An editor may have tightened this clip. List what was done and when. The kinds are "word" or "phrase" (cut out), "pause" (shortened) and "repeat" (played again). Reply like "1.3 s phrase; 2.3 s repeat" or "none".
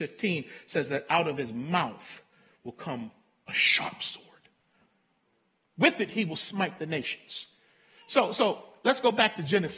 none